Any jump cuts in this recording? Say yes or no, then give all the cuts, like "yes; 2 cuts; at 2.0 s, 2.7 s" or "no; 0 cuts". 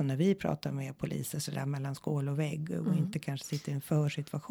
no; 0 cuts